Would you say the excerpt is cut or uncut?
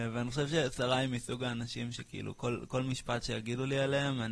uncut